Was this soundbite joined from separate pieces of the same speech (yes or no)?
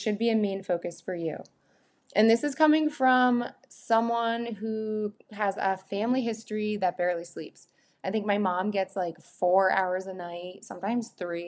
no